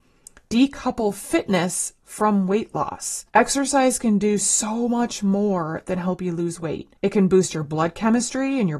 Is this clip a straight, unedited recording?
no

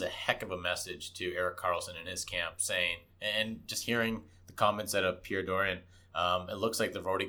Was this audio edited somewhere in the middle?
yes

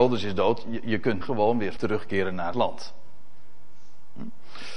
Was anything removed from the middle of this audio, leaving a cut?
yes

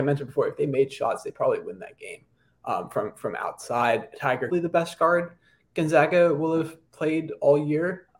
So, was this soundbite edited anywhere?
yes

